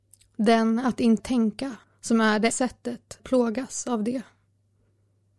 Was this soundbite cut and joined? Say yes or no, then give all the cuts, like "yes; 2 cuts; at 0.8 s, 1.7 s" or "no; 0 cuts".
yes; 4 cuts; at 1.2 s, 1.8 s, 2.5 s, 3.2 s